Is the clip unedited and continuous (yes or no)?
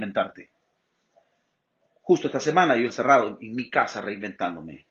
no